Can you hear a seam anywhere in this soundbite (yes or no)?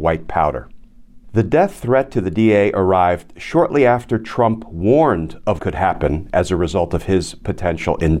yes